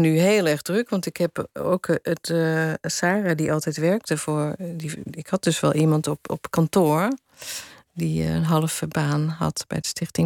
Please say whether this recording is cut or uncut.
uncut